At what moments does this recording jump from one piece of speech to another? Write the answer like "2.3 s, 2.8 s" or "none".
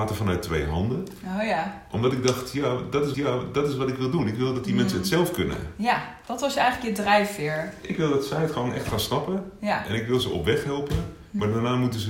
3.1 s